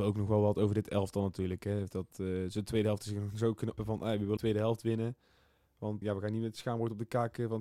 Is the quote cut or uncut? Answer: cut